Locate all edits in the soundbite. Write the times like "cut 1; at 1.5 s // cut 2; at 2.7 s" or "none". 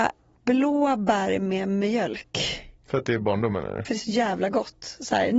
cut 1; at 2.8 s // cut 2; at 3.8 s